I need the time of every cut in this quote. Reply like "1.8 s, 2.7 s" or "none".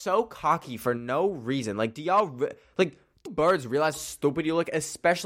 3.3 s, 3.9 s